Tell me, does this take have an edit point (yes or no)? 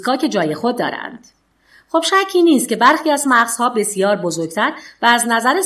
no